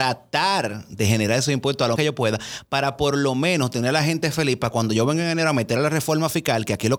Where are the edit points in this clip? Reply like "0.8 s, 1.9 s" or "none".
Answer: 2.0 s